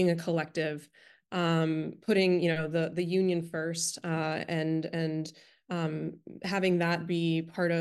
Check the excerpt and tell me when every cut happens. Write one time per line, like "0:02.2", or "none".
none